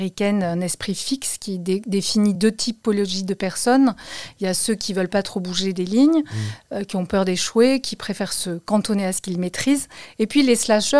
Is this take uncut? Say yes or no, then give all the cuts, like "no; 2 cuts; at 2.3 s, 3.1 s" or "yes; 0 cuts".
yes; 0 cuts